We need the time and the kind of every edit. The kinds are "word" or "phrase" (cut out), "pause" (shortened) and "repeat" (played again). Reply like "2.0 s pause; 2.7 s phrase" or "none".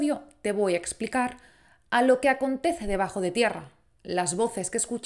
none